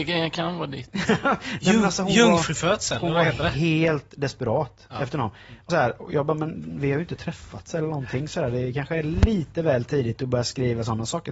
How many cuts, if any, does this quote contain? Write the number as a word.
one